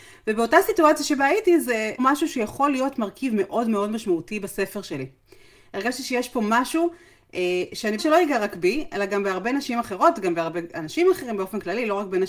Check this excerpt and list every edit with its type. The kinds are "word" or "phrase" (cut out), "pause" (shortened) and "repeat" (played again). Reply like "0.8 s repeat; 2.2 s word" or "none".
2.0 s phrase; 8.0 s word

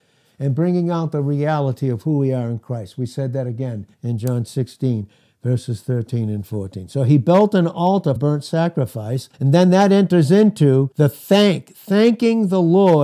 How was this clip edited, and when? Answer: 3.9 s pause; 8.2 s word; 9.3 s pause; 10.9 s pause

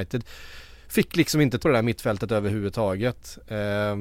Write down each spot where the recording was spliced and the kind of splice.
1.6 s word

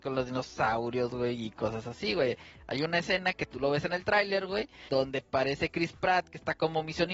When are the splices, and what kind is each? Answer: none

